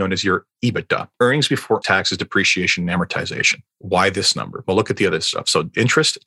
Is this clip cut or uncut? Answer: cut